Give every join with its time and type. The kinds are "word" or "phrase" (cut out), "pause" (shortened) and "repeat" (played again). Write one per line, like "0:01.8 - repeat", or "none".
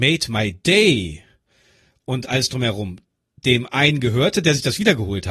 none